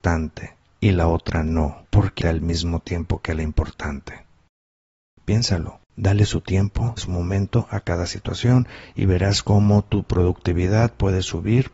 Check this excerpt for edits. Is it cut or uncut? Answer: cut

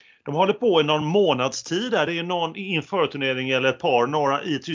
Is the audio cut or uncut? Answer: uncut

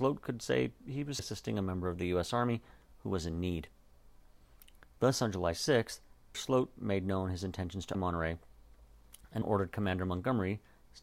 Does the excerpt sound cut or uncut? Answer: cut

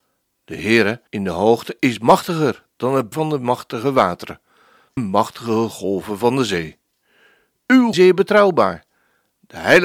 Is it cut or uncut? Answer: cut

